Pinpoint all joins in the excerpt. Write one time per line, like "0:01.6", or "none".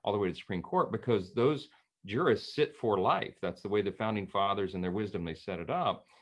none

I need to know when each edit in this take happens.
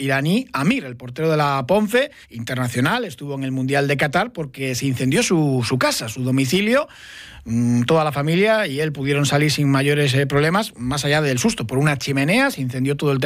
0:02.2

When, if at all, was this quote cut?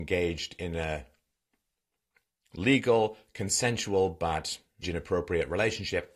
0:04.8

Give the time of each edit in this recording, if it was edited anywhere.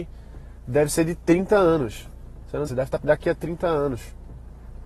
0:02.7
0:03.0

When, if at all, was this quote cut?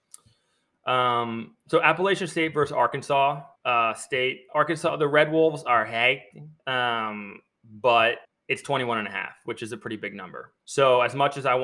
0:03.6
0:06.6
0:08.2
0:10.6

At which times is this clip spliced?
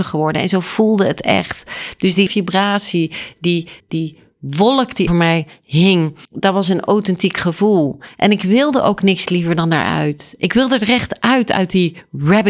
0:02.3
0:03.8
0:05.1
0:06.2

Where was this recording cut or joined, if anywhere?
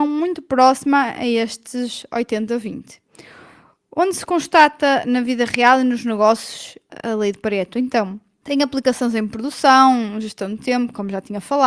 none

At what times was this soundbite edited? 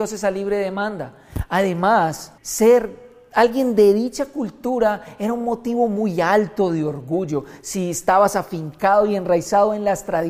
0:02.4

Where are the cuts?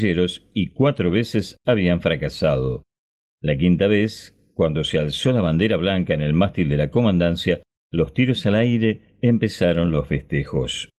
none

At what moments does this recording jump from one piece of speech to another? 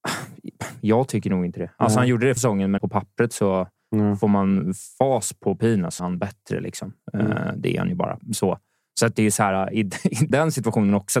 0:02.4
0:02.8
0:06.0
0:10.3

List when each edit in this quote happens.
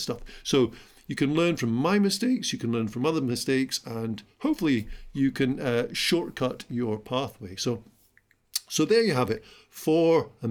none

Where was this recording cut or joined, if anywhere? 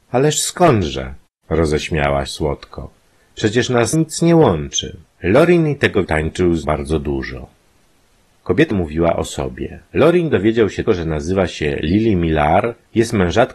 0:02.3
0:03.9
0:05.1
0:06.0
0:06.6
0:08.7
0:09.9
0:10.9

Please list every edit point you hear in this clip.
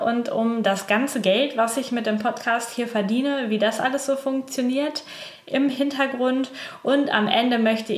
none

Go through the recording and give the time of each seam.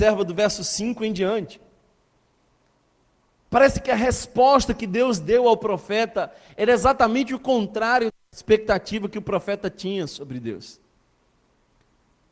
none

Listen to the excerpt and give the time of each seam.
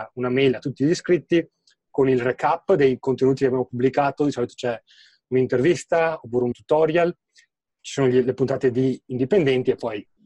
0:06.5

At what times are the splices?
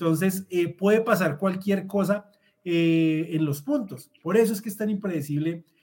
none

